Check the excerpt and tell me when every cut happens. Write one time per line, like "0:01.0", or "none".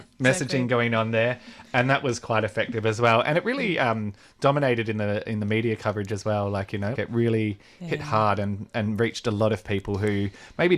0:06.9